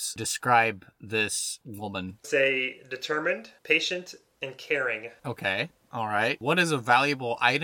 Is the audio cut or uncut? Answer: cut